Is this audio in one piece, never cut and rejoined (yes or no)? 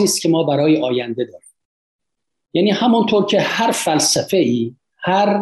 yes